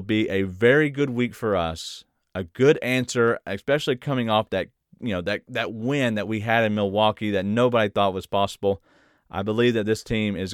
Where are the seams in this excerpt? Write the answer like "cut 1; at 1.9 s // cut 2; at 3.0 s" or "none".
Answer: none